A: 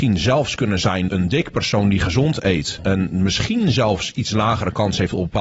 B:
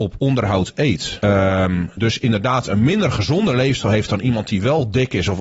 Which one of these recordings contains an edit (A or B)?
A